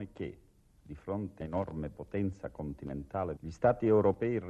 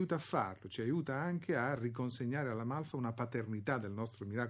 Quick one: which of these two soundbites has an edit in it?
first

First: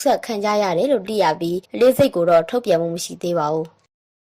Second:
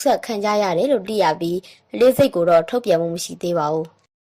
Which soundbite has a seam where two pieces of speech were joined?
first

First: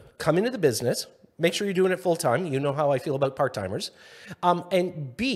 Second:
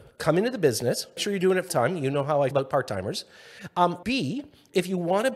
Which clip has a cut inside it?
second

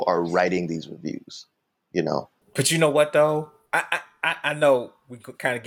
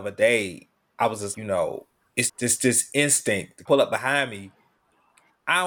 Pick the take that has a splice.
second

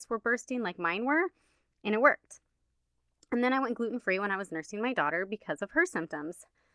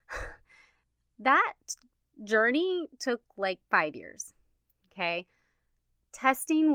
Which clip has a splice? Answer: second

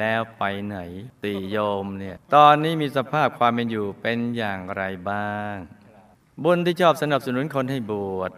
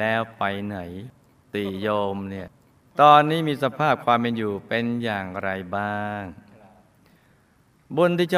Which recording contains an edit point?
first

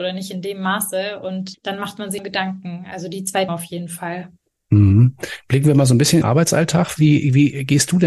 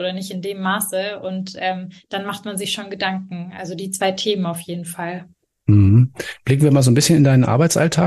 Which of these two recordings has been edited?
first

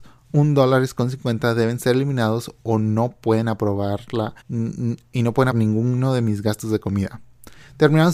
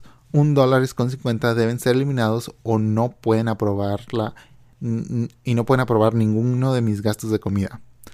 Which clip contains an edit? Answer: first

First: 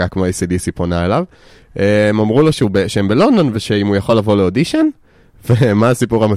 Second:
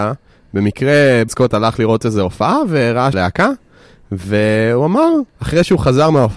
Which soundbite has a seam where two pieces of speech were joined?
second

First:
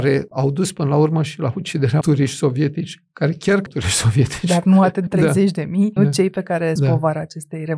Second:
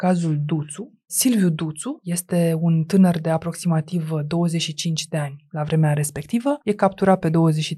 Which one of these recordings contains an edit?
first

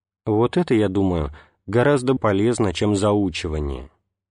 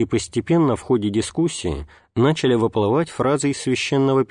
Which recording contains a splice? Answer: first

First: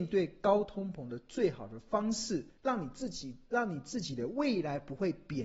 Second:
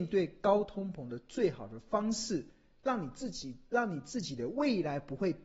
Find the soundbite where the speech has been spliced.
first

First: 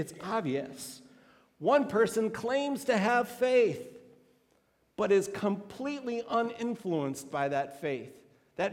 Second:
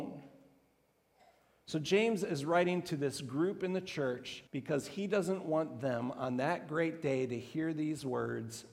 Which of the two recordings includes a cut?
second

